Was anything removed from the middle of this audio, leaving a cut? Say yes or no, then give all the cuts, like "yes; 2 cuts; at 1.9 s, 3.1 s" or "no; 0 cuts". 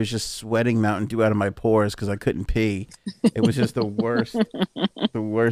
no; 0 cuts